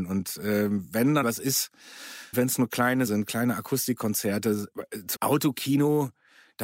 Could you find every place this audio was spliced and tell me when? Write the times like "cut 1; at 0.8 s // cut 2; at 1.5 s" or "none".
cut 1; at 1.2 s // cut 2; at 2.3 s // cut 3; at 3.1 s // cut 4; at 5.1 s